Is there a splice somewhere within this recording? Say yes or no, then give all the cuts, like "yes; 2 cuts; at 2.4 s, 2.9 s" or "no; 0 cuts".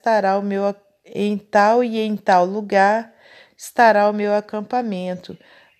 no; 0 cuts